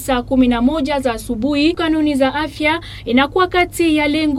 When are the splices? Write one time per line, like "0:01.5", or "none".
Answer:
0:01.8